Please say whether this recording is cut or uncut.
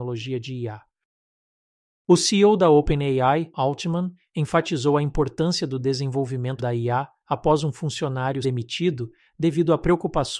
cut